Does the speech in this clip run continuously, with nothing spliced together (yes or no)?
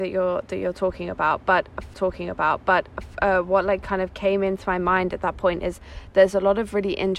no